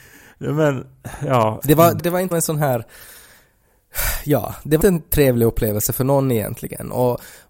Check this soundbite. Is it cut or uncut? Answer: cut